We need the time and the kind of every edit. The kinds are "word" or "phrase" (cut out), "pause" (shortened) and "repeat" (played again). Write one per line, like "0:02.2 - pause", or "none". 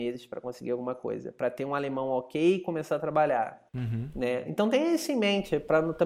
0:03.7 - pause

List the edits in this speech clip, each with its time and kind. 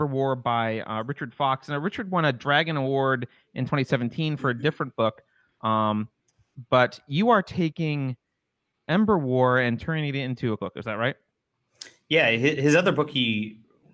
0:10.6 - word

